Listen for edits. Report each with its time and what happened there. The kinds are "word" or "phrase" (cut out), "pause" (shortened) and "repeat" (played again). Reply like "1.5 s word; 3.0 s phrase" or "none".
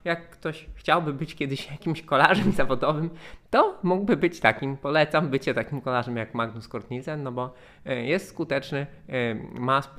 none